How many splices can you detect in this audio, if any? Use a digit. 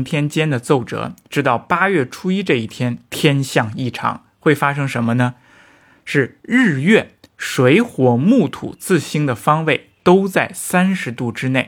0